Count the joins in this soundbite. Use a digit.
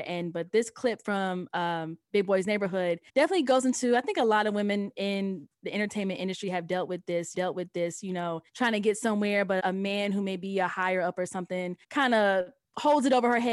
5